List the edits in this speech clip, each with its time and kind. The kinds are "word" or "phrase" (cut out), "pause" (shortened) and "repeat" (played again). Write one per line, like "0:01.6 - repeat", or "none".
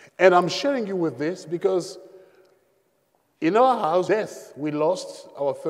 0:04.1 - phrase